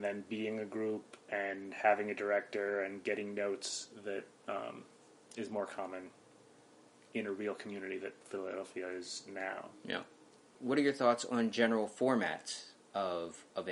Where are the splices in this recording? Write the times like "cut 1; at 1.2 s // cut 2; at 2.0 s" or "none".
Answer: cut 1; at 8.2 s